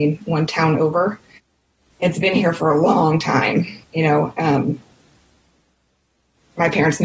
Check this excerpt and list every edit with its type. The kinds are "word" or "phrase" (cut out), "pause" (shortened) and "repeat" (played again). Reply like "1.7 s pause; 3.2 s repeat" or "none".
1.4 s pause; 3.8 s pause

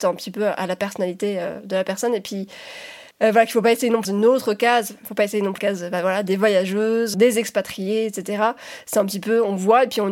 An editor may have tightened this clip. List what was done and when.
3.1 s pause; 4.0 s phrase; 5.6 s phrase; 7.1 s word

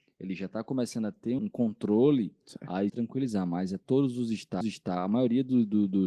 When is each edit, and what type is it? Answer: 1.4 s word; 2.9 s phrase; 3.8 s word; 4.6 s repeat

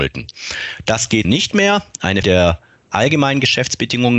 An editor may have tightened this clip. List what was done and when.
1.2 s word; 2.2 s word

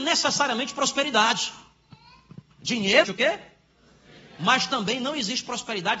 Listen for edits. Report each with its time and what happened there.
3.0 s phrase

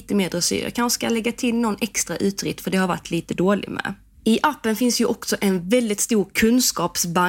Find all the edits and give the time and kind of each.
none

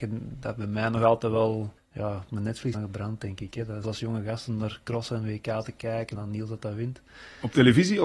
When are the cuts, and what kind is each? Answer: 1.8 s pause; 2.7 s word; 3.8 s phrase; 6.2 s word

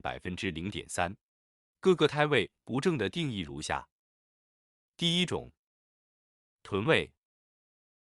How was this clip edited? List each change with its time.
none

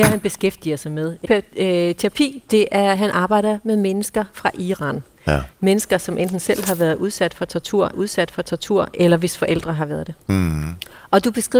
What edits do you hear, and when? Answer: 1.2 s phrase; 3.0 s word; 7.9 s repeat

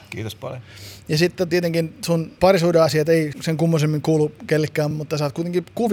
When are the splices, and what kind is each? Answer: 1.5 s word; 2.4 s word; 3.3 s word; 4.9 s word

